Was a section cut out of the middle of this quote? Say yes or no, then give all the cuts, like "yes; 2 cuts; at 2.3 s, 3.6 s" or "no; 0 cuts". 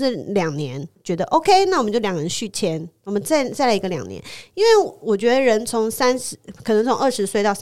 no; 0 cuts